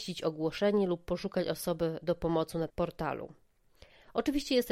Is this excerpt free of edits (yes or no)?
no